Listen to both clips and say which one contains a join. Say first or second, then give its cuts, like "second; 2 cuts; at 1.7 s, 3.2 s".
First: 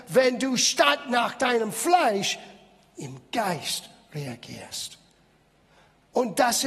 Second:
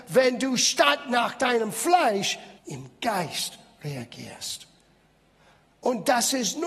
second; 1 cut; at 2.6 s